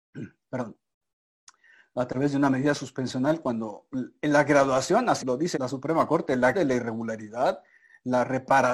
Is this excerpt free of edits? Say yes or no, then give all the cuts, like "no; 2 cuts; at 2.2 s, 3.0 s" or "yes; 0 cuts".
no; 3 cuts; at 5.2 s, 5.5 s, 6.5 s